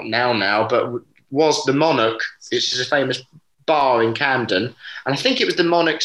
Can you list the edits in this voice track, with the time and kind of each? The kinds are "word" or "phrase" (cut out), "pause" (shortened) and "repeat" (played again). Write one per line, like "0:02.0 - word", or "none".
none